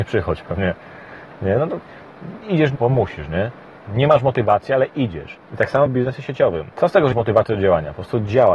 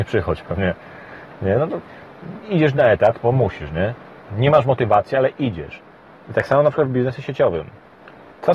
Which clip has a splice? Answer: first; 5 cuts; at 2.8 s, 5.4 s, 5.9 s, 6.7 s, 7.1 s

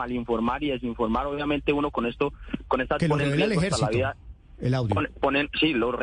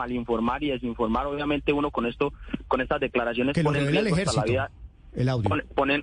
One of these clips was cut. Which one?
first; 1 cut; at 3.0 s

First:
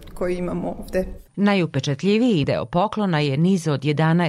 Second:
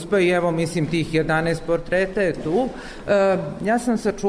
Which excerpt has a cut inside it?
first; 2 cuts; at 1.3 s, 2.4 s

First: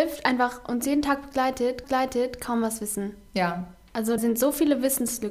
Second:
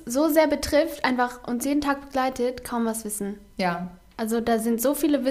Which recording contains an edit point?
first; 2 cuts; at 1.8 s, 4.2 s

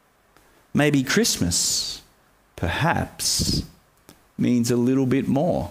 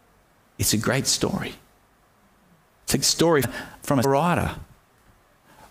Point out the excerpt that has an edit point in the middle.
second; 3 cuts; at 3.0 s, 3.4 s, 4.0 s

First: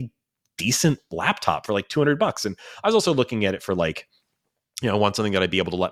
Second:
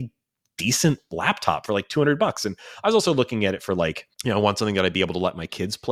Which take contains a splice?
second; 1 cut; at 4.1 s

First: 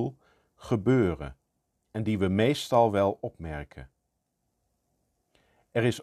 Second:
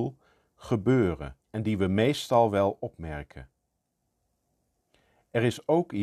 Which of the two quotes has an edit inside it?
second; 1 cut; at 1.4 s

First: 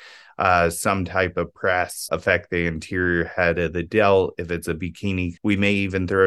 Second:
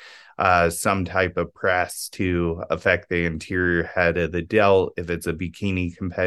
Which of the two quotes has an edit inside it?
first; 2 cuts; at 2.1 s, 5.4 s

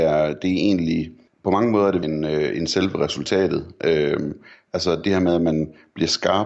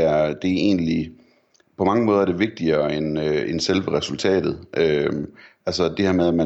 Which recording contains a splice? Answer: first; 2 cuts; at 1.3 s, 2.0 s

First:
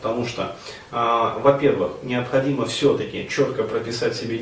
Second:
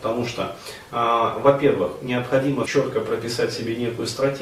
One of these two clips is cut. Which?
second; 1 cut; at 2.6 s

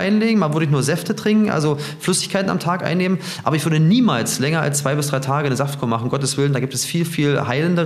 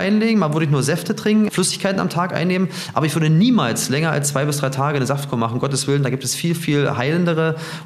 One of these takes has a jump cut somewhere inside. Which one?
second; 1 cut; at 1.5 s

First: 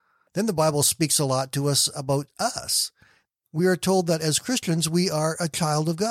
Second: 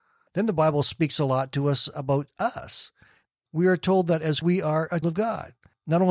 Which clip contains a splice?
second; 2 cuts; at 4.4 s, 5.0 s

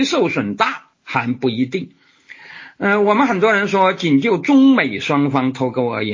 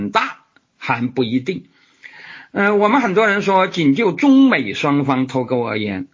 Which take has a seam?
first; 1 cut; at 0.9 s

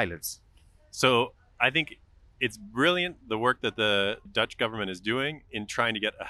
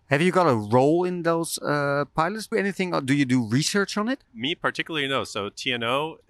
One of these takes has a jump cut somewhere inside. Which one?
second; 1 cut; at 2.5 s

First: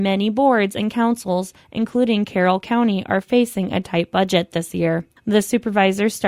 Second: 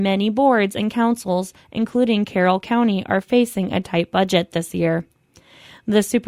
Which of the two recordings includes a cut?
first; 1 cut; at 5.2 s

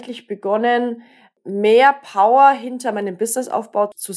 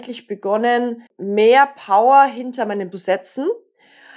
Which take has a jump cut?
second; 2 cuts; at 1.1 s, 2.9 s

